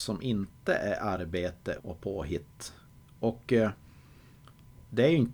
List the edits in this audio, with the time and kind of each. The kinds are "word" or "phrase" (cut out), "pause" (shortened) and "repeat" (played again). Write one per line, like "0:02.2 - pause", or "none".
0:01.8 - word